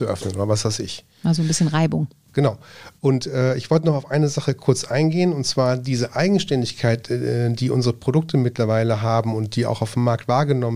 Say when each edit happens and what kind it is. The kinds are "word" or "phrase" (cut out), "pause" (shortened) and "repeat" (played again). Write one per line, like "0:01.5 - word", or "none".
none